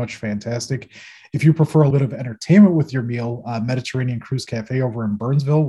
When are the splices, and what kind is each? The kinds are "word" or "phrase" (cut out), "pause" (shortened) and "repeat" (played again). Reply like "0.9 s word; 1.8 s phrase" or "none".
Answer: 1.9 s word